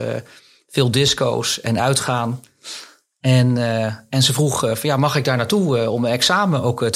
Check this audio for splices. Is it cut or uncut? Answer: uncut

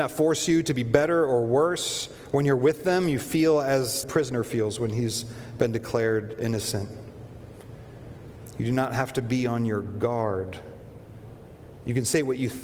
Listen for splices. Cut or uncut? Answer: cut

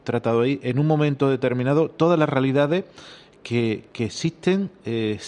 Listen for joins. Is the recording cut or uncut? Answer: uncut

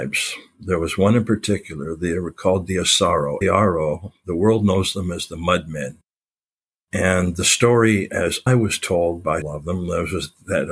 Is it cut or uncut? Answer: cut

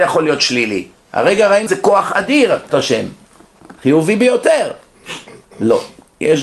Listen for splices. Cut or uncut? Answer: cut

